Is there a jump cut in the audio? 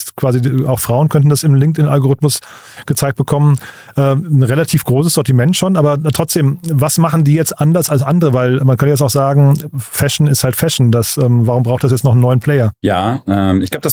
yes; 1 cut; at 8.6 s

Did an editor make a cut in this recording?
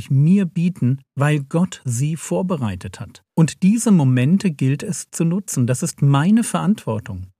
yes; 2 cuts; at 1.1 s, 3.3 s

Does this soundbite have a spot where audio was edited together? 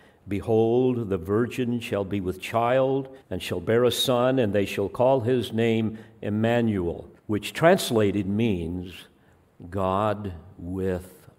yes; 2 cuts; at 3.2 s, 7.2 s

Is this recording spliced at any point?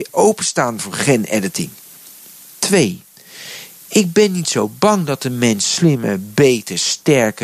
no; 0 cuts

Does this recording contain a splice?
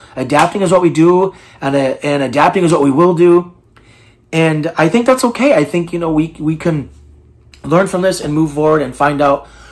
no; 0 cuts

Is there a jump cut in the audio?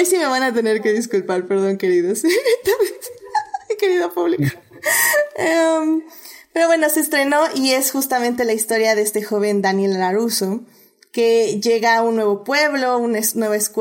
no; 0 cuts

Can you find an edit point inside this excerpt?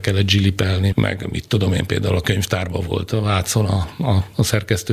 yes; 2 cuts; at 0.9 s, 1.3 s

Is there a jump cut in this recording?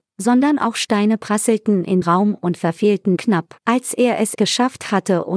yes; 4 cuts; at 2.0 s, 3.2 s, 3.6 s, 4.3 s

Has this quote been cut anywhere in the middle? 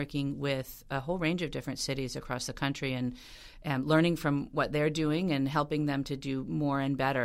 no; 0 cuts

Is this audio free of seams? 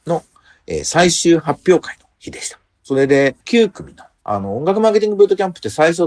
no; 1 cut; at 3.4 s

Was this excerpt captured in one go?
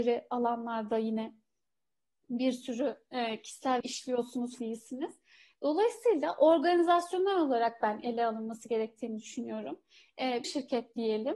no; 3 cuts; at 3.8 s, 4.6 s, 10.4 s

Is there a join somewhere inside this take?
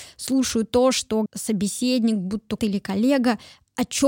yes; 2 cuts; at 1.3 s, 2.6 s

